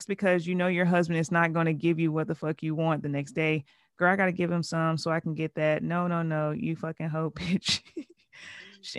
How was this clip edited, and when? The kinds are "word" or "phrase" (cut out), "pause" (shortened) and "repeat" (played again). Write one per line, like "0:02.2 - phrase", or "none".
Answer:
none